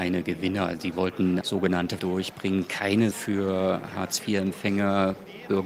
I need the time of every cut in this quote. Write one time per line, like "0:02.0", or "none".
0:01.4
0:02.0
0:03.1